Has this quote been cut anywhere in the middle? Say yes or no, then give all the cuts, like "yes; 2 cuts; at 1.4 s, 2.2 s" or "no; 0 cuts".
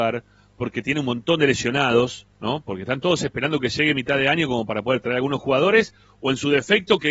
no; 0 cuts